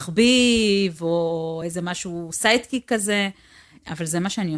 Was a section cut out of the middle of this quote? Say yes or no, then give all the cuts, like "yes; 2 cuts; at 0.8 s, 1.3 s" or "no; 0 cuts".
no; 0 cuts